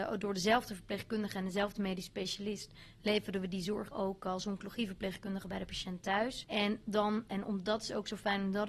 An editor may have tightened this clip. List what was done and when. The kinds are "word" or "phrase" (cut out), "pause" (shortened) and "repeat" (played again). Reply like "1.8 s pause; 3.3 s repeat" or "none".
3.9 s word; 7.3 s phrase